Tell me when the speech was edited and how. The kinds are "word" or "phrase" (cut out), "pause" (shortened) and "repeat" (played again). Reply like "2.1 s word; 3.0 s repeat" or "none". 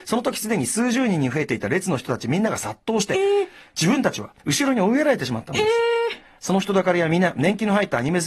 4.4 s pause